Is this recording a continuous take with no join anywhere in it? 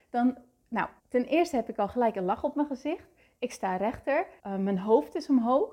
no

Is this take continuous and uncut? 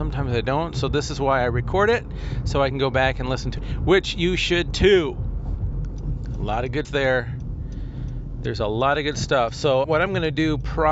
no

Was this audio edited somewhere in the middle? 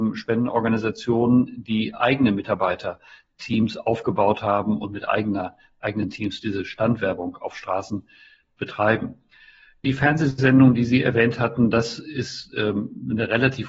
no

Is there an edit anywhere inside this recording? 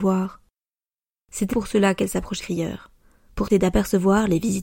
yes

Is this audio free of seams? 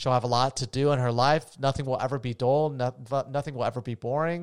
yes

